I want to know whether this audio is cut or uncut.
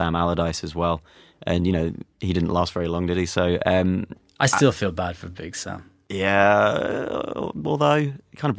uncut